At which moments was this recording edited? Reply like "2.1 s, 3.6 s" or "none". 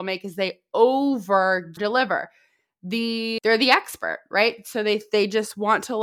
1.8 s, 3.4 s